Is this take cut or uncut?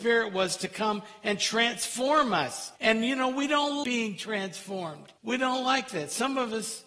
cut